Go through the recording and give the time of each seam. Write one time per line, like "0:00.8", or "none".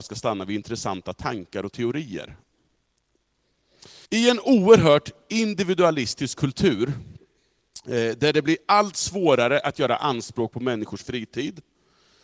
0:04.1